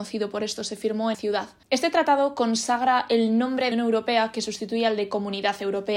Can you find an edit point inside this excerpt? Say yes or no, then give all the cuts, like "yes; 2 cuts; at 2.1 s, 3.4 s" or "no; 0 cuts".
yes; 3 cuts; at 1.1 s, 1.6 s, 3.7 s